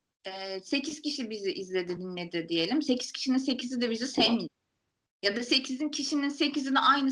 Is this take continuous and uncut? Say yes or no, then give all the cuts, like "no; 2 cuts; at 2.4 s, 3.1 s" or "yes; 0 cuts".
yes; 0 cuts